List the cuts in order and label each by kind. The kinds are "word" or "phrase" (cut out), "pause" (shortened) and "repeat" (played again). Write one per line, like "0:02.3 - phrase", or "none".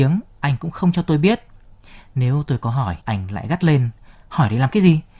0:03.0 - pause